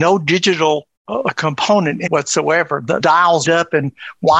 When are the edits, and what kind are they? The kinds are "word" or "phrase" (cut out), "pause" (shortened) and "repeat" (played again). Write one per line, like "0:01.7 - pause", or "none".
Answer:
0:01.0 - pause
0:02.1 - word
0:03.0 - word
0:03.4 - word